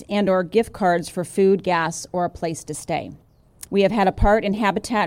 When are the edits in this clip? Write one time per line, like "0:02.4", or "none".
0:03.7